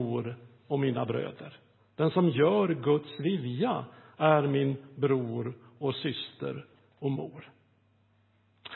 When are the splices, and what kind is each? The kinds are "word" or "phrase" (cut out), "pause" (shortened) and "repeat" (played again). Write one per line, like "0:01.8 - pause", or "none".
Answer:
none

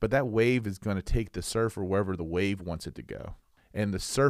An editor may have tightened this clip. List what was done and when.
none

